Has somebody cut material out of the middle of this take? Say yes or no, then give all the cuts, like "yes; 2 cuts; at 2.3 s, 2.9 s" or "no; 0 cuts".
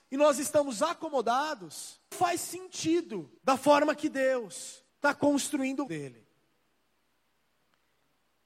yes; 4 cuts; at 2.1 s, 3.4 s, 4.9 s, 5.9 s